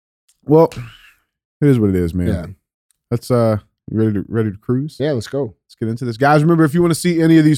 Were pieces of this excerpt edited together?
no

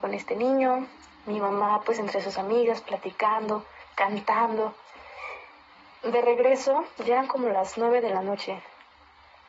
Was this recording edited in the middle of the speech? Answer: no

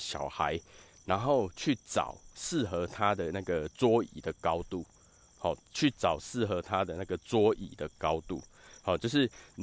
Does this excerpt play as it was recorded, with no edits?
yes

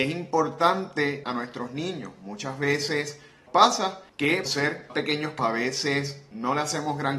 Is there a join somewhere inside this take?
yes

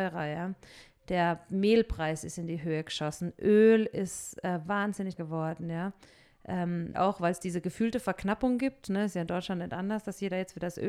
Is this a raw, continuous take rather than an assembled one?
no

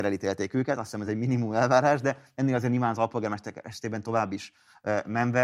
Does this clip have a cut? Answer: no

